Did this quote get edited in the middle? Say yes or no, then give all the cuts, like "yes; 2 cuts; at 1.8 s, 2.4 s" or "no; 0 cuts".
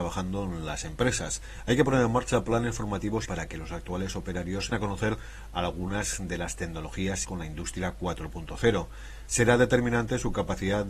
yes; 3 cuts; at 3.3 s, 4.7 s, 7.2 s